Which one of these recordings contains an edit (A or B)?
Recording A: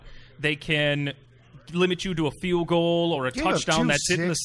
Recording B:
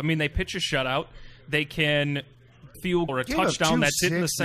B